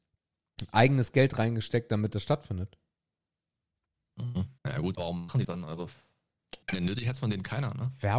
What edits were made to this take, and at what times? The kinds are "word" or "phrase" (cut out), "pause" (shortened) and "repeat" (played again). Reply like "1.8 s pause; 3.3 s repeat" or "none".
4.6 s pause; 4.9 s word; 5.4 s word; 6.6 s pause